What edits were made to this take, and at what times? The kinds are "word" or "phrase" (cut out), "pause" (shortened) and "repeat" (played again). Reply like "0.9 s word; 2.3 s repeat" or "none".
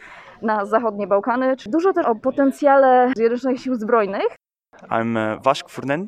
2.0 s word; 3.1 s word

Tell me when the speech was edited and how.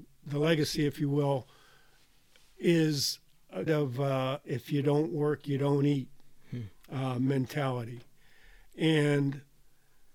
3.7 s word

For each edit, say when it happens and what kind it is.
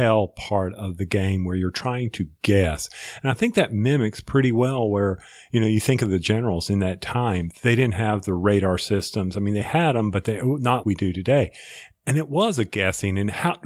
10.8 s word

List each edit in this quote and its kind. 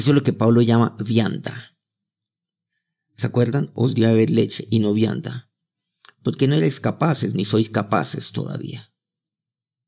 none

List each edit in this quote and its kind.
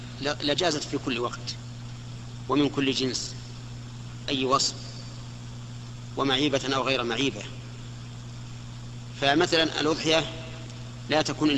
4.3 s word

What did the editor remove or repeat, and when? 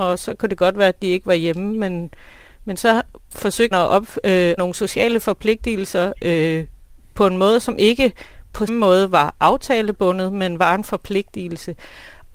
3.7 s word; 4.6 s word; 8.7 s word

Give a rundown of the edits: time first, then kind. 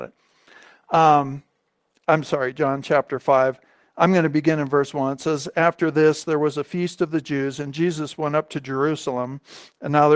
none

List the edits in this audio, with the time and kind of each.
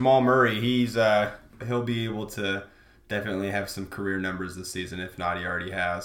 none

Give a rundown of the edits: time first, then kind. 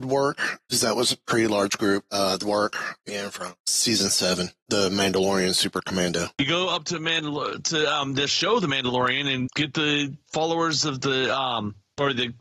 2.4 s phrase; 3.1 s phrase; 9.5 s word; 10.2 s word

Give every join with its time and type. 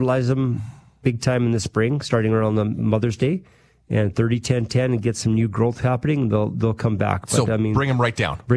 none

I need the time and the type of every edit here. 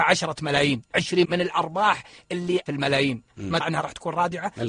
0.9 s word; 1.2 s word; 2.7 s word; 3.6 s word

